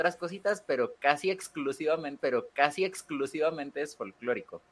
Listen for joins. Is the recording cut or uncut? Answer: cut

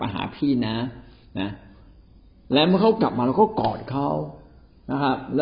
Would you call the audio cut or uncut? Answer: uncut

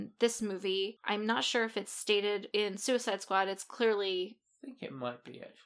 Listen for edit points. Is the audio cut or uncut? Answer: uncut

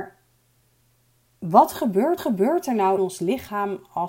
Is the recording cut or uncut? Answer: cut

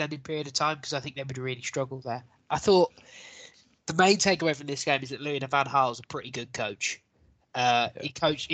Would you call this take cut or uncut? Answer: uncut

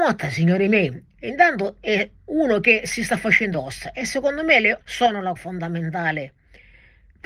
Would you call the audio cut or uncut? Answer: cut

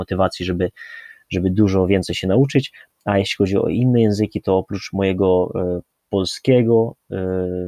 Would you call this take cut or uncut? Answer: uncut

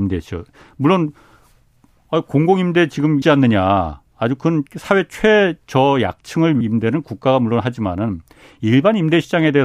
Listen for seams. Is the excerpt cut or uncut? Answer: cut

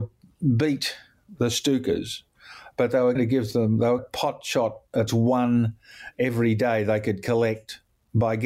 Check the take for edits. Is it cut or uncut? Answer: cut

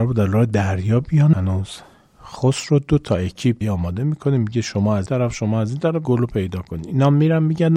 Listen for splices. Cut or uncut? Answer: cut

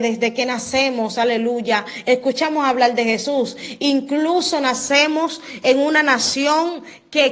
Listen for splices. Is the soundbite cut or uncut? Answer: uncut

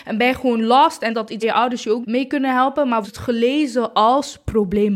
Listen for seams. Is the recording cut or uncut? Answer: cut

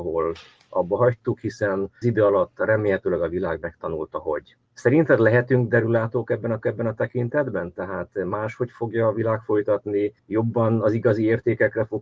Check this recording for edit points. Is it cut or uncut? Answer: cut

